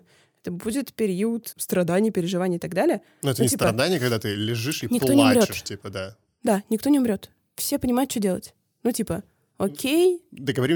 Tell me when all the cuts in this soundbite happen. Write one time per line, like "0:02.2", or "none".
0:01.5